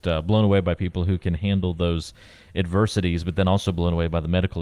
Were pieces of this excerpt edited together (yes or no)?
no